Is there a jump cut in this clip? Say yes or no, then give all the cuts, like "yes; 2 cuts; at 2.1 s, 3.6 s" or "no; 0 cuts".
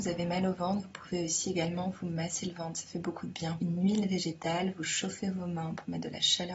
yes; 1 cut; at 3.6 s